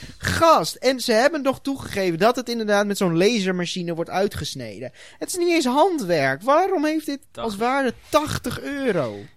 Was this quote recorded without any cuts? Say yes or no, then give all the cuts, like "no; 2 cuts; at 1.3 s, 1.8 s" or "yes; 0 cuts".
no; 1 cut; at 7.2 s